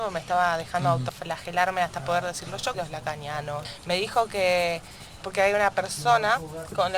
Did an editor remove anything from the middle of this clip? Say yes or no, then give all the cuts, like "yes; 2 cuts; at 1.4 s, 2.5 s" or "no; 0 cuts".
yes; 2 cuts; at 2.7 s, 5.2 s